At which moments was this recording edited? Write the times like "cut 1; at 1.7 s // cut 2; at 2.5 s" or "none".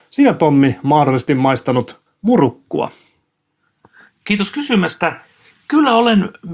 cut 1; at 2.1 s